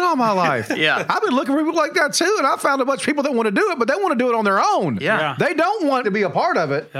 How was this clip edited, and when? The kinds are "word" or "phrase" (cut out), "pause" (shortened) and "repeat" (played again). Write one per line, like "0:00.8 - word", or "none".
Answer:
0:06.0 - word